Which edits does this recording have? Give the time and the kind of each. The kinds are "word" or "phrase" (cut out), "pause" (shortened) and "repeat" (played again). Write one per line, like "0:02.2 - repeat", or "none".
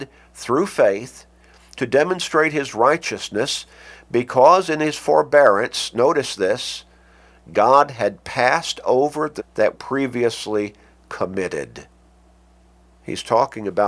0:09.4 - word
0:09.7 - word